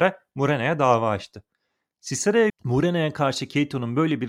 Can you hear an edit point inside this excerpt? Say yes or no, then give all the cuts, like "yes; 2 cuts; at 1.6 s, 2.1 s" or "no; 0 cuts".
yes; 1 cut; at 2.5 s